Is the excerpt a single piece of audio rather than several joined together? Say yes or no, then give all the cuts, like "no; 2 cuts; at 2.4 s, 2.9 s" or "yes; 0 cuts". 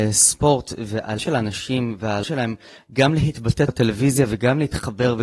no; 3 cuts; at 1.2 s, 2.2 s, 3.7 s